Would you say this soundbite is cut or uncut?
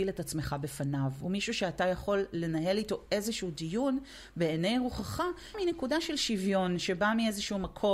cut